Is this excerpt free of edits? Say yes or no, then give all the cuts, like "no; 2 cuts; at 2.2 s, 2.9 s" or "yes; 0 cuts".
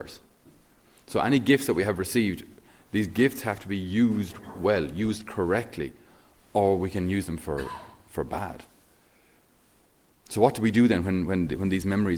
yes; 0 cuts